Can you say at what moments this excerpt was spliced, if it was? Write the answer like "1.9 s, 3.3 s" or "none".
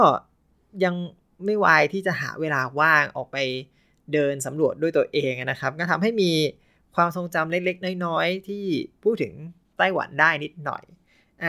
none